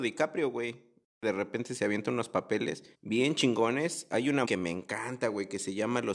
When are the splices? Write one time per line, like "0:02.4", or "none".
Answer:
0:02.9
0:04.4